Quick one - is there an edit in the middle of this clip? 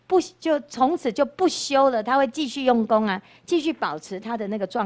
no; 0 cuts

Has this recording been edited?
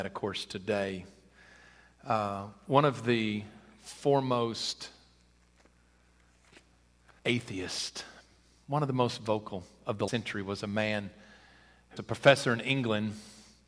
yes; 3 cuts; at 7.2 s, 10.1 s, 12.0 s

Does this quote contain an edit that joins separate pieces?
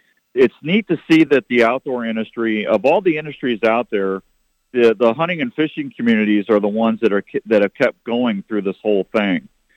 no; 0 cuts

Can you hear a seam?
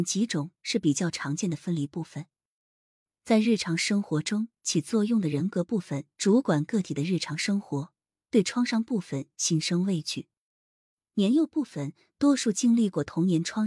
yes; 1 cut; at 6.1 s

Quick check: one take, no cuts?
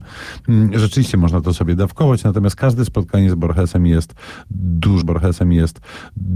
no; 1 cut; at 5.0 s

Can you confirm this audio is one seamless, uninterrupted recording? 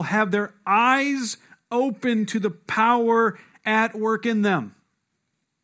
yes; 0 cuts

